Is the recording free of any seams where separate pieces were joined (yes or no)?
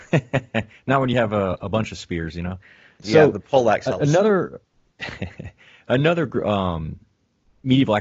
yes